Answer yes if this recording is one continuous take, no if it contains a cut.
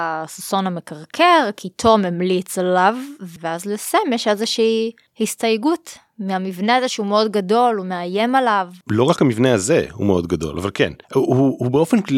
no